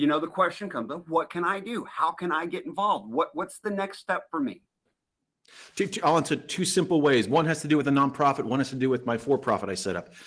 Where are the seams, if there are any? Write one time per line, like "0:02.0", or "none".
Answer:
none